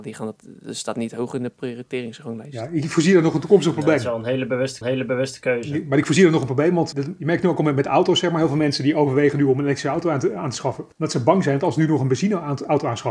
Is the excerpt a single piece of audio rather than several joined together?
no; 3 cuts; at 4.8 s, 6.9 s, 10.9 s

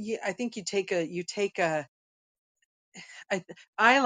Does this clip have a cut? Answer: no; 0 cuts

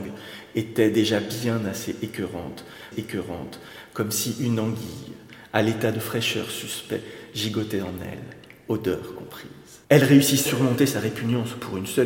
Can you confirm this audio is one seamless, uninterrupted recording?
no; 3 cuts; at 2.9 s, 9.8 s, 10.5 s

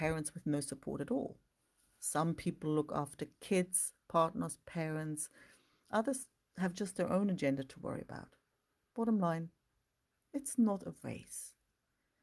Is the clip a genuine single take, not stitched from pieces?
yes; 0 cuts

